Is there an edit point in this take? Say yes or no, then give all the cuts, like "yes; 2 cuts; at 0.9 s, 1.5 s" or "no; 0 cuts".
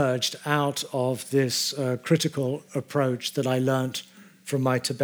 no; 0 cuts